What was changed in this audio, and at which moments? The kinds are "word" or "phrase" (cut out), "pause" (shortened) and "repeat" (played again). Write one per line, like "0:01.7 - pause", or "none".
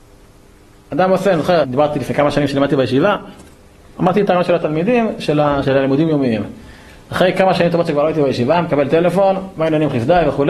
0:01.6 - word
0:05.6 - word